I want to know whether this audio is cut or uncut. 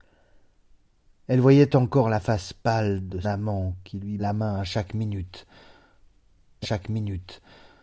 cut